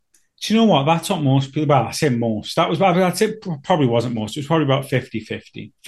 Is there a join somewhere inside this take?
no; 0 cuts

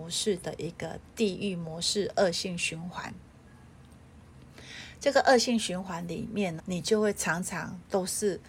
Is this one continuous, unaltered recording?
no; 1 cut; at 6.6 s

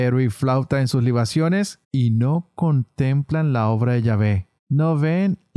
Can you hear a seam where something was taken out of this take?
yes; 2 cuts; at 1.8 s, 4.6 s

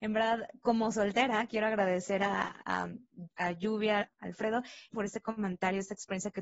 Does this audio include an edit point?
yes; 2 cuts; at 4.1 s, 4.9 s

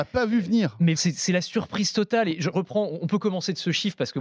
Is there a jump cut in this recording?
yes; 2 cuts; at 1.0 s, 2.5 s

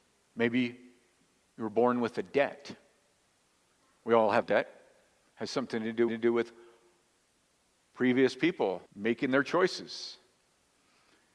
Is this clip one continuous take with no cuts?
no; 3 cuts; at 4.4 s, 6.1 s, 8.9 s

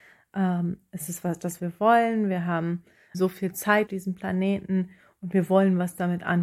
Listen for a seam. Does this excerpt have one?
yes; 3 cuts; at 1.6 s, 3.1 s, 3.9 s

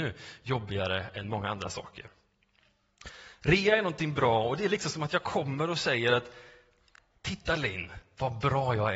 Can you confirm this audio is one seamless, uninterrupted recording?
yes; 0 cuts

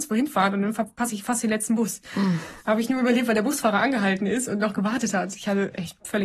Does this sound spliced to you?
yes; 1 cut; at 2.6 s

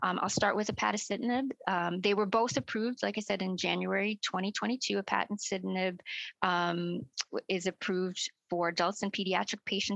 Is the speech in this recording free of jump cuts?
yes; 0 cuts

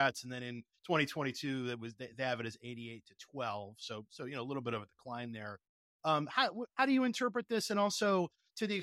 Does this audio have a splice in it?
no; 0 cuts

